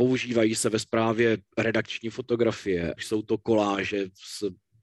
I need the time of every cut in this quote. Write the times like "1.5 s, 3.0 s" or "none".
1.5 s, 3.0 s